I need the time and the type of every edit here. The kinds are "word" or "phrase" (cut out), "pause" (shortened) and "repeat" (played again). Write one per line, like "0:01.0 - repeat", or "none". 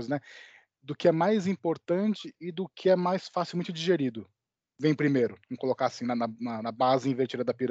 none